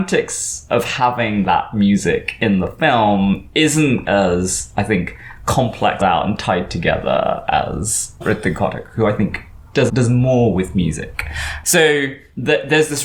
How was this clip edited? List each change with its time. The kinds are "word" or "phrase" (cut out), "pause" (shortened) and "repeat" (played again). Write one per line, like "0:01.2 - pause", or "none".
0:04.0 - word
0:06.0 - phrase
0:08.2 - word
0:09.9 - word